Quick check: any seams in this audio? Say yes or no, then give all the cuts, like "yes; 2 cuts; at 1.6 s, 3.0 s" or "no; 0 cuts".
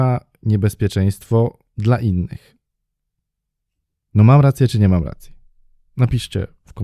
no; 0 cuts